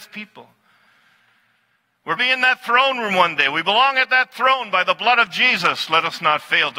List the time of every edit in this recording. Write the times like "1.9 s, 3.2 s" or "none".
2.2 s